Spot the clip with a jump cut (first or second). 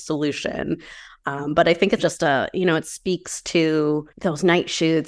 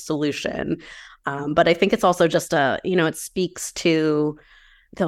first